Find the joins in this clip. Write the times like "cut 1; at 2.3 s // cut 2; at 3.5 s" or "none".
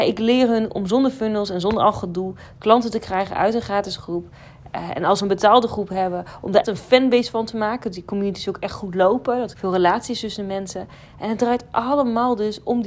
cut 1; at 6.6 s // cut 2; at 9.5 s